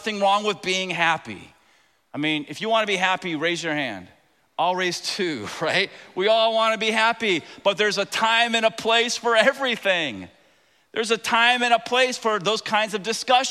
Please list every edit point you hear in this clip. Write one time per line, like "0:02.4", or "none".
none